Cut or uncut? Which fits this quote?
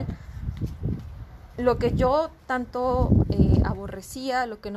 uncut